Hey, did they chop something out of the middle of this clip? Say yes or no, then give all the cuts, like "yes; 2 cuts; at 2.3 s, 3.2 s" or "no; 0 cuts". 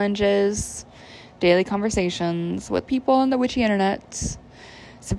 yes; 1 cut; at 2.9 s